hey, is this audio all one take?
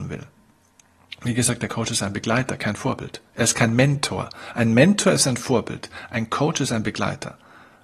yes; 0 cuts

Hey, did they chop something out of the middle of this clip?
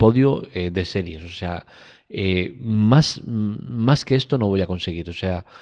no; 0 cuts

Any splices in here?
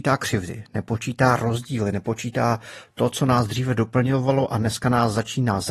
no; 0 cuts

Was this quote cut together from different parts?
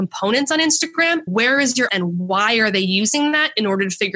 yes; 2 cuts; at 1.3 s, 1.9 s

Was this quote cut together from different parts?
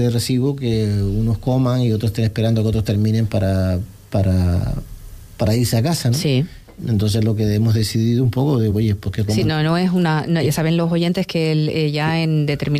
no; 0 cuts

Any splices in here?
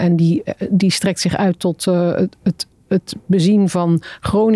no; 0 cuts

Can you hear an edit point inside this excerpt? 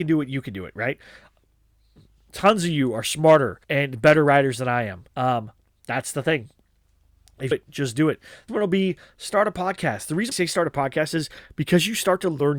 yes; 5 cuts; at 3.6 s, 5.1 s, 7.5 s, 8.5 s, 10.3 s

